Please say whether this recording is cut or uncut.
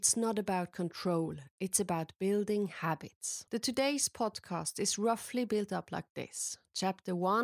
cut